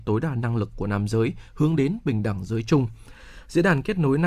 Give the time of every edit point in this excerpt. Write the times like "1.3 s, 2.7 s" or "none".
none